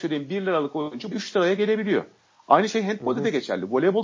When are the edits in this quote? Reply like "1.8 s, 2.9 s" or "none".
1.1 s